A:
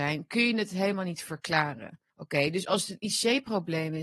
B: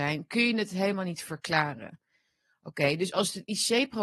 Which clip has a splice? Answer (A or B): A